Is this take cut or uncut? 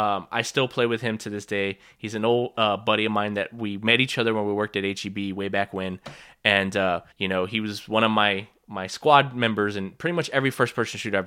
cut